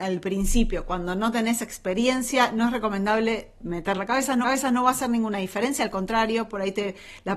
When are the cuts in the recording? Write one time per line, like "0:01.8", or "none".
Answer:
0:03.9
0:04.4